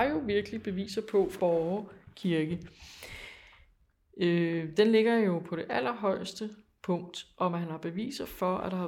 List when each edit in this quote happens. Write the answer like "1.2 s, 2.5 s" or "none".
1.4 s